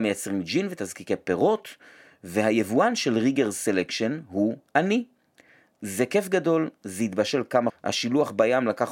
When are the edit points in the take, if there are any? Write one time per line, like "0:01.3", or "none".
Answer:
0:07.7